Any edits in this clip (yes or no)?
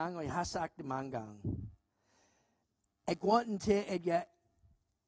no